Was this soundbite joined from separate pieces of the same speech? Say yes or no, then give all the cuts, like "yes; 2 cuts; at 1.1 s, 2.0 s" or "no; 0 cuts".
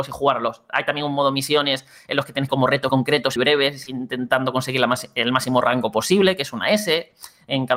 yes; 3 cuts; at 2.5 s, 2.9 s, 3.4 s